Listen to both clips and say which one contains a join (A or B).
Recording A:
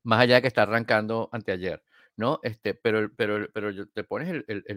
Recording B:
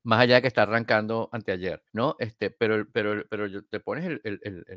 B